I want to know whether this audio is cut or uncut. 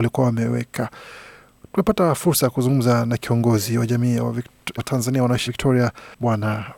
cut